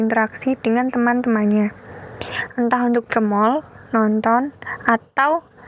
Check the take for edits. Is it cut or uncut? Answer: cut